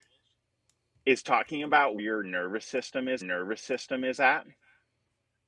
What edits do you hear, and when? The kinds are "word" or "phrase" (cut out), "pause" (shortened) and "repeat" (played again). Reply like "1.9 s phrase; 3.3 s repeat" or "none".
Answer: 2.0 s word; 3.2 s repeat